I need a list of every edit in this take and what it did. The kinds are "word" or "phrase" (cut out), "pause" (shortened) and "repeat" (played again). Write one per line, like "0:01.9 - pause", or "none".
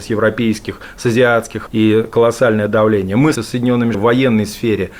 0:01.7 - word
0:03.4 - word
0:03.9 - word